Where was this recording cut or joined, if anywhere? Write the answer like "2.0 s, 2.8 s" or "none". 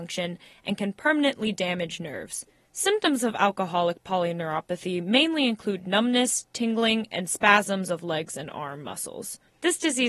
none